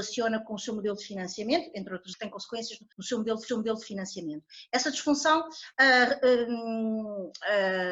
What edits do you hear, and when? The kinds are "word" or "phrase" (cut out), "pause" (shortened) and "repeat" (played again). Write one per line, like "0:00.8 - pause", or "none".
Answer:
0:02.1 - phrase
0:02.9 - pause
0:03.5 - repeat
0:05.7 - pause